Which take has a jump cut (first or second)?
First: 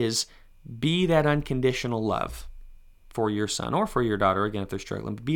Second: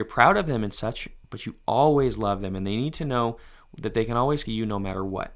second